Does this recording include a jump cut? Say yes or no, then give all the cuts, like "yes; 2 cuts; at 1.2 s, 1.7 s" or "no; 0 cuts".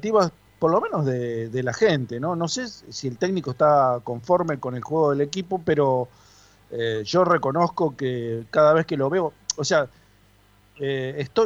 no; 0 cuts